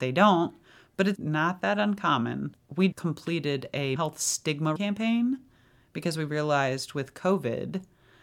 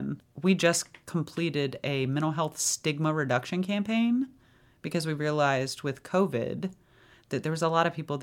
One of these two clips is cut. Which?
first; 4 cuts; at 1.2 s, 2.9 s, 4.0 s, 4.8 s

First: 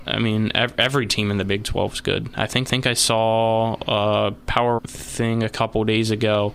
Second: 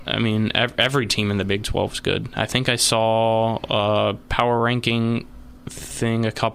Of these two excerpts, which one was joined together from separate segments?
first; 2 cuts; at 2.7 s, 4.8 s

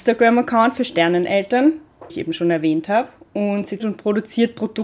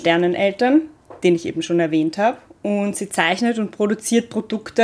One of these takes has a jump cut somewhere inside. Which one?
first; 2 cuts; at 2.1 s, 3.8 s

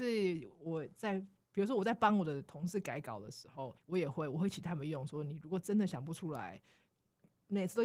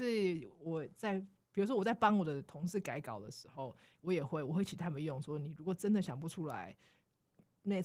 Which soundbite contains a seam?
first; 1 cut; at 3.8 s

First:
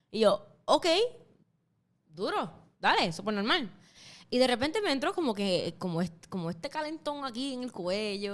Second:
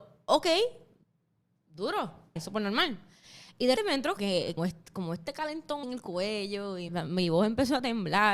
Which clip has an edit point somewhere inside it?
second; 6 cuts; at 2.4 s, 3.8 s, 4.2 s, 4.6 s, 5.8 s, 6.9 s

